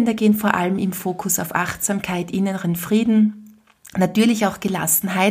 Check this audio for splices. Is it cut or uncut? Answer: uncut